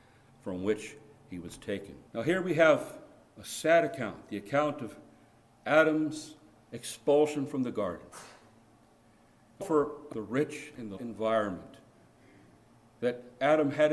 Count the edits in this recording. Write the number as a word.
four